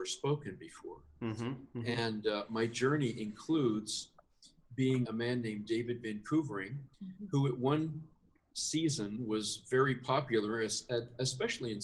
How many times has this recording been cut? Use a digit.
2